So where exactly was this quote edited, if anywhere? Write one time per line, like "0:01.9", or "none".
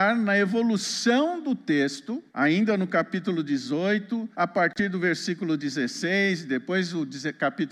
0:02.3
0:04.3